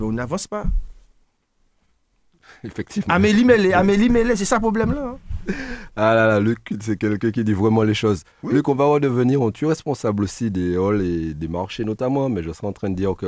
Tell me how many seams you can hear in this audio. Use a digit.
0